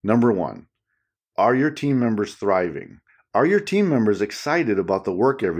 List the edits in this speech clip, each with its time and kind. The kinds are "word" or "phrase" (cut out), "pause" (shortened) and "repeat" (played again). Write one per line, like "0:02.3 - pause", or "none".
0:03.1 - pause